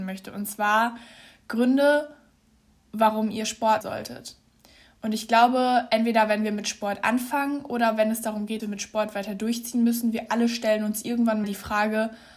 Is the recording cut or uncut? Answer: cut